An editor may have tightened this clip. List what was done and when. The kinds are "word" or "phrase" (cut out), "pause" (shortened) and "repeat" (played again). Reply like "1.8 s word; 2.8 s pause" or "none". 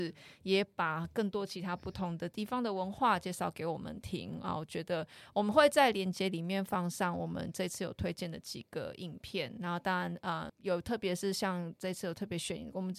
10.5 s word